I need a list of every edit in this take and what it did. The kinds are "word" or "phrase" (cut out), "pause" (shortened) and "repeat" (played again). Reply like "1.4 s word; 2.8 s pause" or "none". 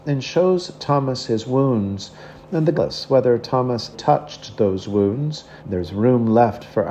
2.7 s phrase; 3.9 s word; 5.6 s pause

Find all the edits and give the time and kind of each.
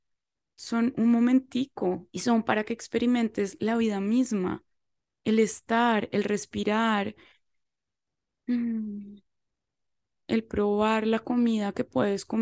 none

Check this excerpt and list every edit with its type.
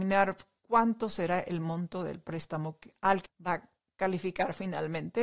3.3 s word

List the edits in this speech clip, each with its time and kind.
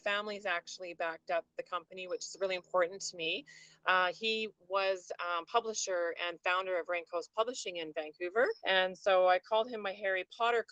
8.6 s pause

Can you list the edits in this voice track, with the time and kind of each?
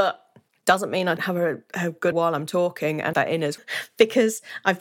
1.2 s word; 2.1 s word; 3.1 s word; 3.6 s word

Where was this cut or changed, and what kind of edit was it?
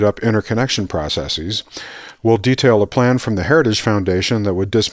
none

